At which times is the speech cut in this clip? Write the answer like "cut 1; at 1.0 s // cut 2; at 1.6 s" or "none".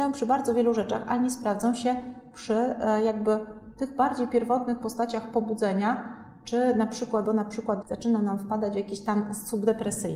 cut 1; at 7.3 s // cut 2; at 7.8 s